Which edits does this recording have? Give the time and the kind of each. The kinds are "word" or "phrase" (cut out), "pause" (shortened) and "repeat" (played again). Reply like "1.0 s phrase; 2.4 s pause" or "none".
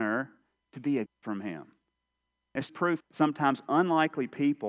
1.1 s word; 2.7 s word; 3.0 s phrase